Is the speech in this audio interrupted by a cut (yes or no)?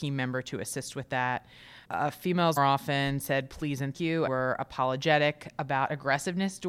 yes